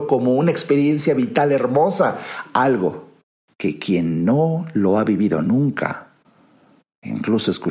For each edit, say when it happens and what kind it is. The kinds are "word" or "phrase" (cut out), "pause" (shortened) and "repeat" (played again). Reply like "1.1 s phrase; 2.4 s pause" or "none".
3.2 s pause